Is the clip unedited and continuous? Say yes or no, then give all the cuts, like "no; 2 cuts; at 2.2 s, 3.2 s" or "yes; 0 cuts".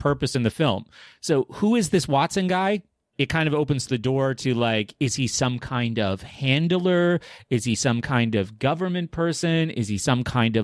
yes; 0 cuts